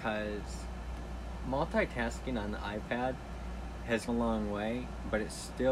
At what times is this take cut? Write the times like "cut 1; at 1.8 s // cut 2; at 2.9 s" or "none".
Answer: cut 1; at 4.1 s